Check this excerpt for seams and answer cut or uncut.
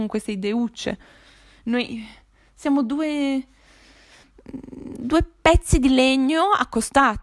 uncut